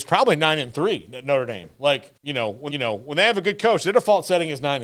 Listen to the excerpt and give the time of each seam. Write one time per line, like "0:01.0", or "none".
0:02.2
0:02.7